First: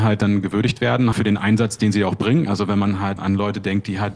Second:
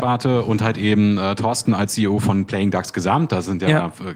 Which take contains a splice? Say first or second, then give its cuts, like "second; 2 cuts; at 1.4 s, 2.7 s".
first; 2 cuts; at 1.1 s, 3.2 s